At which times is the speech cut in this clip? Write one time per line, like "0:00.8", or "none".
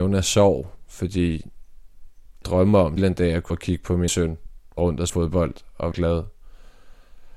0:02.4
0:03.0
0:03.5
0:04.1
0:04.8
0:05.1
0:05.9

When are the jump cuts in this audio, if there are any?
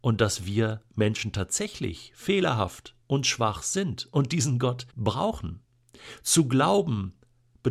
0:03.0
0:04.9

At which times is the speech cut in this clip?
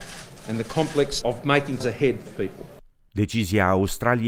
0:01.2
0:01.8
0:02.3

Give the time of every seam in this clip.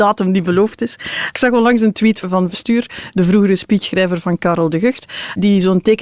0:02.5

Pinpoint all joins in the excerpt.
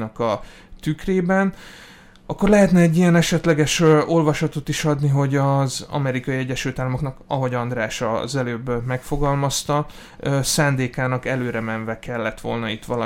none

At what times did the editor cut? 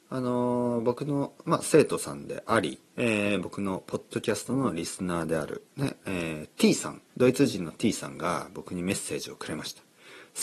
0:02.9
0:05.7
0:07.1

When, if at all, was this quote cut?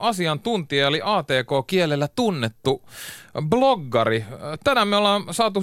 none

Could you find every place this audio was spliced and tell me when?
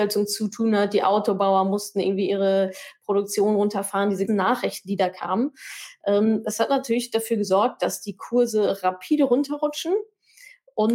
0:04.3

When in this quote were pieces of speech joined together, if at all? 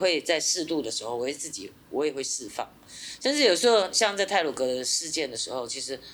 none

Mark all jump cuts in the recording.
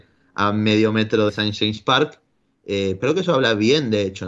0:01.3
0:03.0

